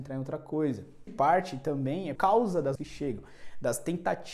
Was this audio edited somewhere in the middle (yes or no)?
yes